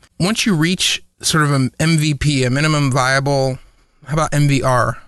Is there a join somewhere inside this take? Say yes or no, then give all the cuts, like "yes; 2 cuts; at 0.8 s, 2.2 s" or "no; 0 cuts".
no; 0 cuts